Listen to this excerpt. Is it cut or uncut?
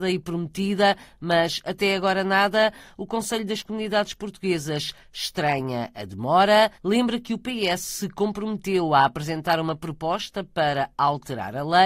cut